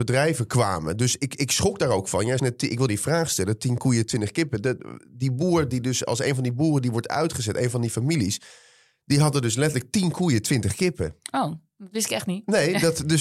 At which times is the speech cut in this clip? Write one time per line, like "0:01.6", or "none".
0:02.4
0:02.9